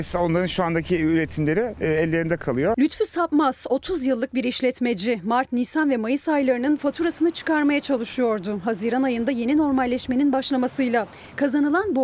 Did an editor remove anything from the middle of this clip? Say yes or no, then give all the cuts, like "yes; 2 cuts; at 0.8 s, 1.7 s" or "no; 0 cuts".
no; 0 cuts